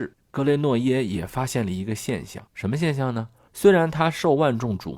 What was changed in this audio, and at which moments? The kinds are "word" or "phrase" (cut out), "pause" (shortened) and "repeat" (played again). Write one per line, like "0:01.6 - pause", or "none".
0:02.5 - pause